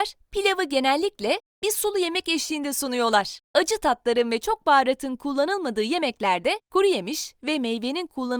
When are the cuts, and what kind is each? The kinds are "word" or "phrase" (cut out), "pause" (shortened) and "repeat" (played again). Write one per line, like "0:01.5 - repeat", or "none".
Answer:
0:03.4 - pause
0:06.6 - pause